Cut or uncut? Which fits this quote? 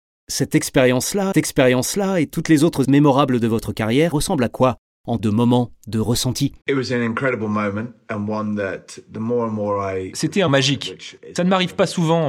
cut